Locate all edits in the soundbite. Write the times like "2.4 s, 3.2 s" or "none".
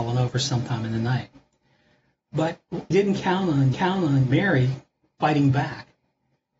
2.9 s, 3.7 s